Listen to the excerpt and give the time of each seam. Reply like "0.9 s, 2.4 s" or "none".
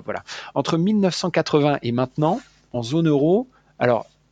none